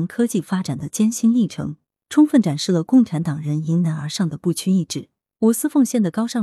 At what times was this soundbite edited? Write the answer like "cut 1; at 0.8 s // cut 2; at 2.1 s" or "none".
none